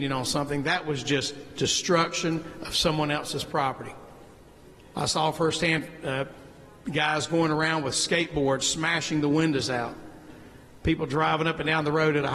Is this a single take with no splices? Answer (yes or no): yes